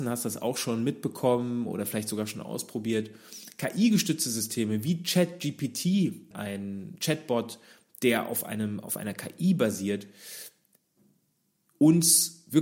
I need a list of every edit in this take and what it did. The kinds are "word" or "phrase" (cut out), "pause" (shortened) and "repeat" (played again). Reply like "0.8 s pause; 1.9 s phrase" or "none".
6.3 s word